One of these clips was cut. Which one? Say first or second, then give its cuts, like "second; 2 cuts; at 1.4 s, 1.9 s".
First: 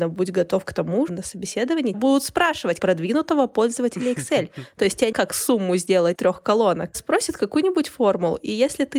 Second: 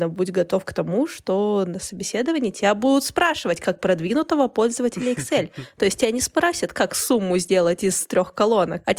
first; 6 cuts; at 1.1 s, 1.9 s, 2.8 s, 5.1 s, 6.1 s, 6.9 s